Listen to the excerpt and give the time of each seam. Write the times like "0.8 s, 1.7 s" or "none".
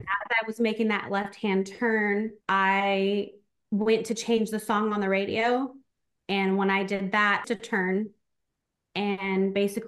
2.4 s, 7.4 s